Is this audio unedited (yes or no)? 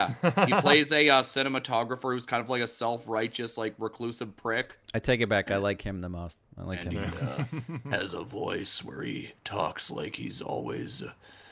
no